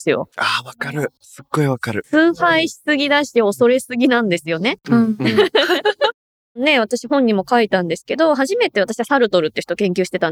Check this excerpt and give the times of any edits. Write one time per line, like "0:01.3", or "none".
none